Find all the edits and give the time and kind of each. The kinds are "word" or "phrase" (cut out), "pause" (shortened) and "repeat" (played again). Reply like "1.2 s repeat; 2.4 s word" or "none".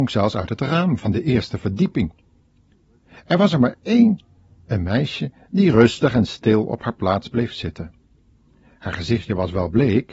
none